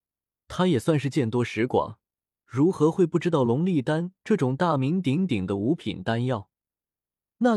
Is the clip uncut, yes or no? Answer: yes